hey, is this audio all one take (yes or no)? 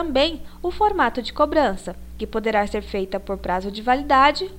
yes